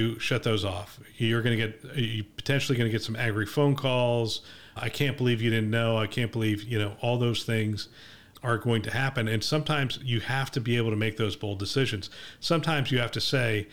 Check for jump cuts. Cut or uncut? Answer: uncut